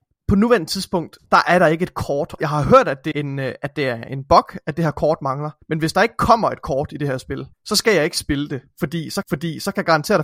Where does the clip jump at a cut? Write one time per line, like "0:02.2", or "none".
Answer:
0:01.3
0:02.4
0:03.1
0:05.6
0:07.5
0:09.2